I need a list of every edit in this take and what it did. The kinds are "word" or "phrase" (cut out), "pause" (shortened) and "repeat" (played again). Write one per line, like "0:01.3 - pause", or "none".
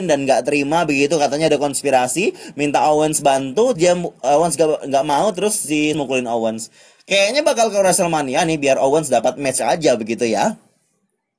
0:03.7 - word
0:05.9 - phrase